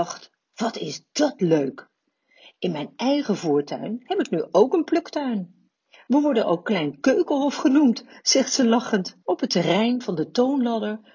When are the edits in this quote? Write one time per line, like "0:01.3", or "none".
0:09.2